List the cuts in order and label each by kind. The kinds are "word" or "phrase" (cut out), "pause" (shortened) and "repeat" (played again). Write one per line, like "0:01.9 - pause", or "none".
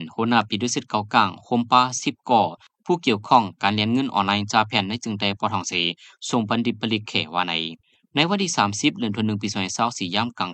none